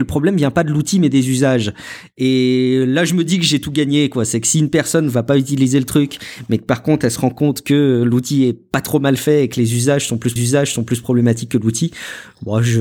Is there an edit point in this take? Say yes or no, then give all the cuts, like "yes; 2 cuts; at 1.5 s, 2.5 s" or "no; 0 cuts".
yes; 1 cut; at 10.4 s